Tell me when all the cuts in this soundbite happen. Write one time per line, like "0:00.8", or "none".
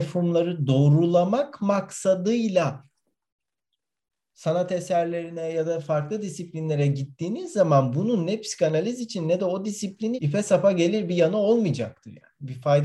0:10.2